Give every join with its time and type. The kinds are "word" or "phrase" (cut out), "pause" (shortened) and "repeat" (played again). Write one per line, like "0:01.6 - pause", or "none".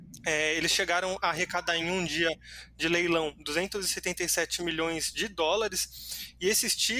none